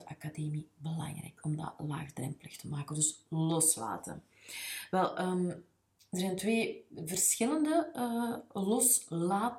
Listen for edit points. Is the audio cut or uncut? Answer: uncut